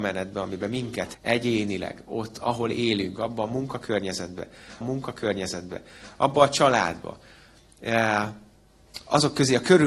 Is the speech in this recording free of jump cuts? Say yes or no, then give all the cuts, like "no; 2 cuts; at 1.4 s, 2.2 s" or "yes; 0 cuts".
no; 2 cuts; at 1.1 s, 4.8 s